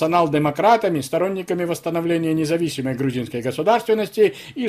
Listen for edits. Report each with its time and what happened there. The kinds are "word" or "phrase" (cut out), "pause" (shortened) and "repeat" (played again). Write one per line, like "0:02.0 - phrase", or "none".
none